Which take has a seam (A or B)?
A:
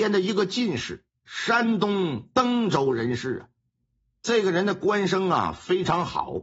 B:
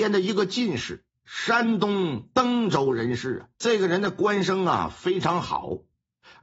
B